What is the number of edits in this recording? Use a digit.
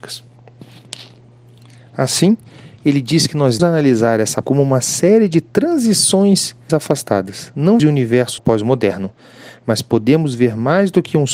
5